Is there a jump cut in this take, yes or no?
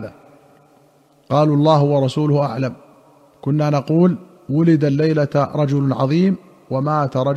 no